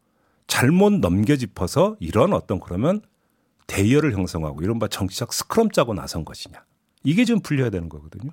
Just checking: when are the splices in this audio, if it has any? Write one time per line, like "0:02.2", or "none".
none